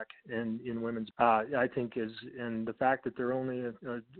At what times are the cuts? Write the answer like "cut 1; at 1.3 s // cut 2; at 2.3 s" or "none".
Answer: cut 1; at 1.1 s